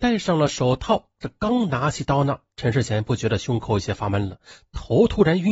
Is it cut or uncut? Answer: uncut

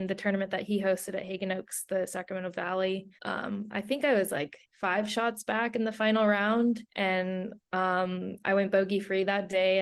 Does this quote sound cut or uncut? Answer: cut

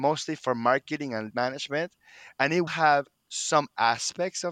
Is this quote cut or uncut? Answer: cut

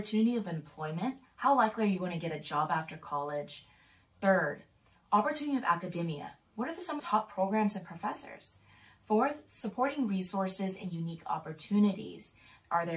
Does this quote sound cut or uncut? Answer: cut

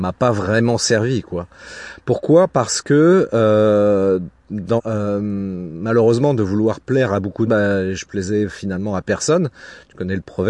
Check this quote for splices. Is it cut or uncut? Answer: cut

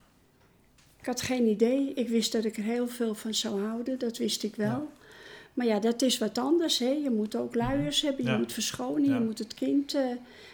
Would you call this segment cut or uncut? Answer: uncut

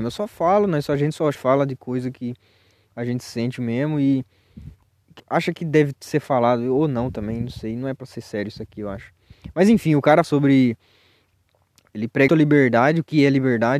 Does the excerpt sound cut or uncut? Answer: cut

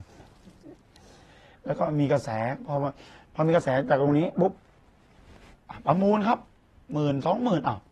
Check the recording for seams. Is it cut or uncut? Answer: uncut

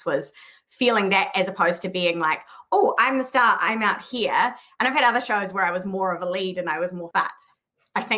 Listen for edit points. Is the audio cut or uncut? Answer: cut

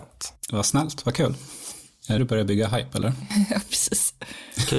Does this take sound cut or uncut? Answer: cut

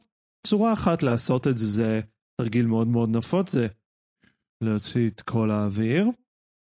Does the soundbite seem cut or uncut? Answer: uncut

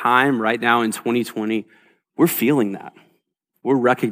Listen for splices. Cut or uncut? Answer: uncut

